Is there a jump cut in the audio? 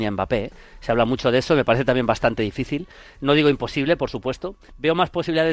no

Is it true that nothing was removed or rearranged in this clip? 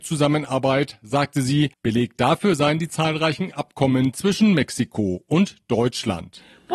no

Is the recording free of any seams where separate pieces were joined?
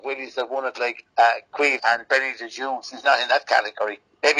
no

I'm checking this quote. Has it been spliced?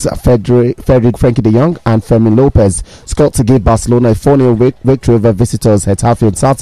yes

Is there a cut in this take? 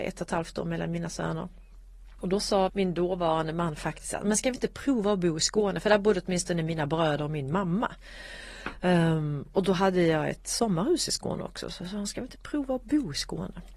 yes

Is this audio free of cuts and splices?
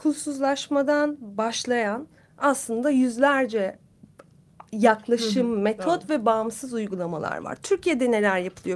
yes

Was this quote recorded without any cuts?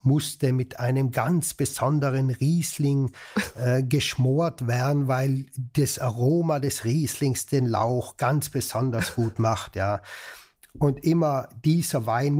yes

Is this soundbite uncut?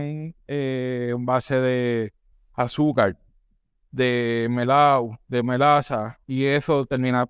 no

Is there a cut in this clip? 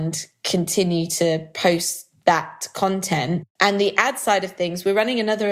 no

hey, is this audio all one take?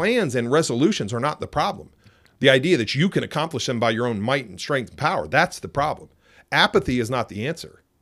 yes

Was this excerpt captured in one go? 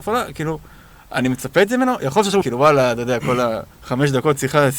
no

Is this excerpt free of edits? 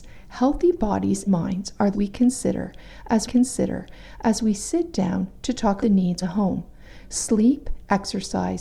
no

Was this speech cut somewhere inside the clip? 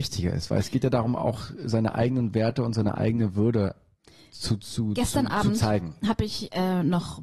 no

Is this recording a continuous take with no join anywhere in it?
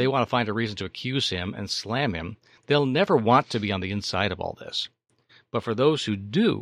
yes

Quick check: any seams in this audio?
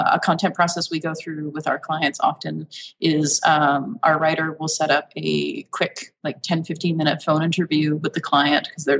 no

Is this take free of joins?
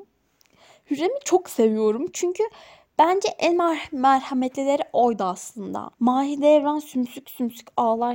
no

